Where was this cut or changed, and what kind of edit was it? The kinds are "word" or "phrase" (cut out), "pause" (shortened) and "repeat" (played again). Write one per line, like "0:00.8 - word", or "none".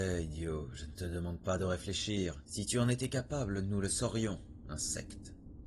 0:02.4 - pause